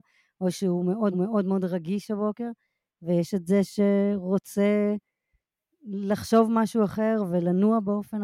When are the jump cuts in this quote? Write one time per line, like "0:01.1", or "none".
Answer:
0:01.1